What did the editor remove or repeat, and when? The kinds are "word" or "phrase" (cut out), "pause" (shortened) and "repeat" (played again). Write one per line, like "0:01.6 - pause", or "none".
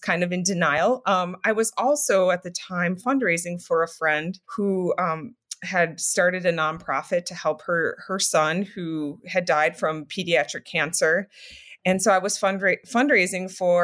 0:04.4 - pause